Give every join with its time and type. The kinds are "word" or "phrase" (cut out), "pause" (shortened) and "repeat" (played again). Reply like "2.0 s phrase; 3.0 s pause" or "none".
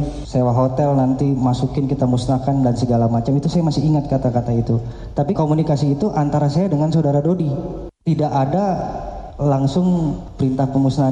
5.3 s word